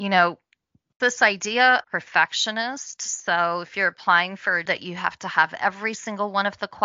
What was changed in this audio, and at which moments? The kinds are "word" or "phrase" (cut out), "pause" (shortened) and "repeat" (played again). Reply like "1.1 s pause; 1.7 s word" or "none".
1.0 s word; 1.8 s word; 4.7 s word